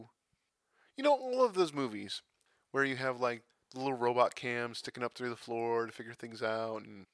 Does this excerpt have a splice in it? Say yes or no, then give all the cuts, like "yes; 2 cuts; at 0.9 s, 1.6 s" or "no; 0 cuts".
no; 0 cuts